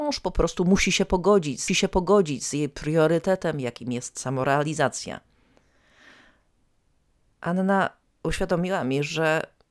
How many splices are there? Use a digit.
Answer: 2